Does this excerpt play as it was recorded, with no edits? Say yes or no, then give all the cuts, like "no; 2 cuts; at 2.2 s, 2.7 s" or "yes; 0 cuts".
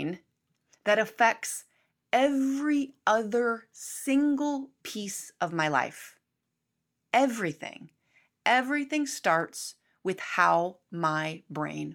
yes; 0 cuts